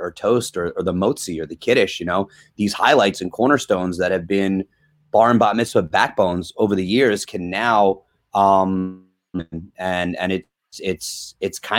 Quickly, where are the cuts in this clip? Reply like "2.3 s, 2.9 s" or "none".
none